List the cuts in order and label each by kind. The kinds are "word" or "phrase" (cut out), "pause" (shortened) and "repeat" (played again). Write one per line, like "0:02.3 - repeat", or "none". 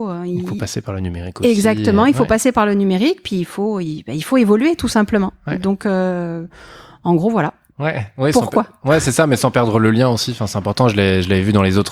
none